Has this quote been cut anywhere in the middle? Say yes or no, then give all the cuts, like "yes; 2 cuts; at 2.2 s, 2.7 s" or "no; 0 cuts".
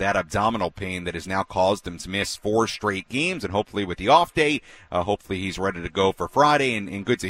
no; 0 cuts